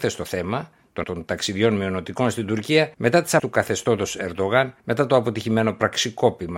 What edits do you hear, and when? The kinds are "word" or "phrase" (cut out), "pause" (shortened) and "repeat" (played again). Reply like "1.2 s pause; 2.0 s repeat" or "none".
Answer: 1.0 s word; 2.9 s pause; 3.4 s word; 4.8 s pause